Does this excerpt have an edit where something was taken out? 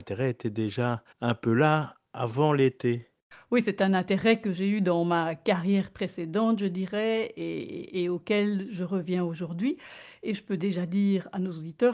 yes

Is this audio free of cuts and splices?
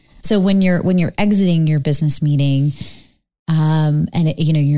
yes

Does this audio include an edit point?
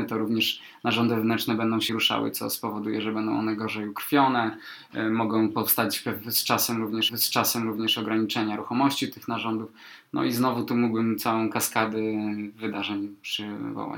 yes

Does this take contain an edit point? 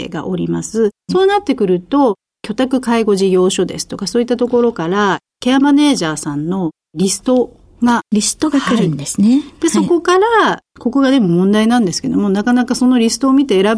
yes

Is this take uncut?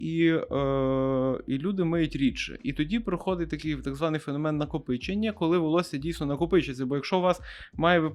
yes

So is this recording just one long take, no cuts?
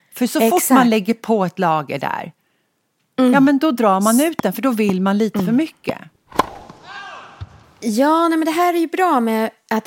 yes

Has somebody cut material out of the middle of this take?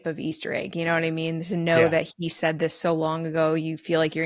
no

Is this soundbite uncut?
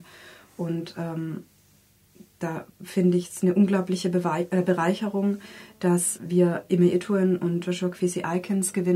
no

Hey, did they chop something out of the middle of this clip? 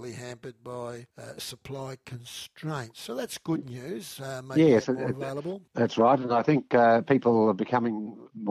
yes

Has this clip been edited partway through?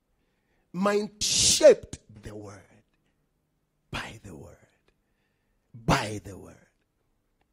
yes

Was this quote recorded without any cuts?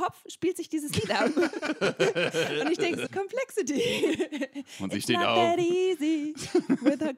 no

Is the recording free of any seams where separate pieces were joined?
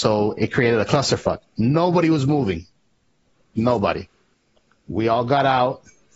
no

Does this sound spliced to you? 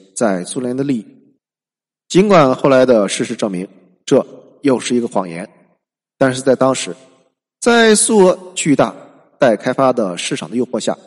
no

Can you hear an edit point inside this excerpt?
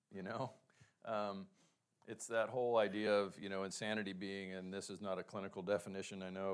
no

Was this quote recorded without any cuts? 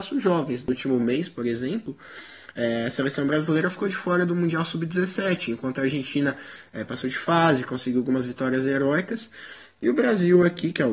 yes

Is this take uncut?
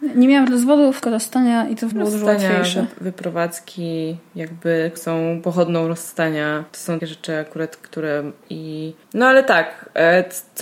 no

